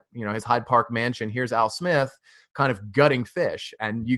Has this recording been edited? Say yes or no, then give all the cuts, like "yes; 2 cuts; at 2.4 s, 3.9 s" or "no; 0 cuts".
no; 0 cuts